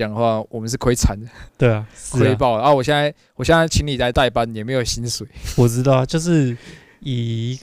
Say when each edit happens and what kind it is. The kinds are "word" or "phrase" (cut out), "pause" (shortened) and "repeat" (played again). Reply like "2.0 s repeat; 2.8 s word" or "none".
1.5 s pause